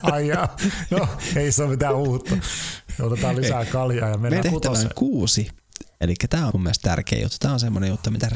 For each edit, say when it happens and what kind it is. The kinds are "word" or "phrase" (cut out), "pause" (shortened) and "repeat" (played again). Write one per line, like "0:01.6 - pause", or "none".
0:04.4 - word
0:06.0 - word
0:06.5 - word